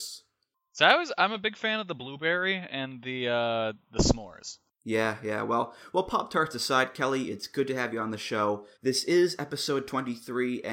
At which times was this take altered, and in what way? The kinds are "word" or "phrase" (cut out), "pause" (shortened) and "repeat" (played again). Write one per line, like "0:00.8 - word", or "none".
0:08.7 - pause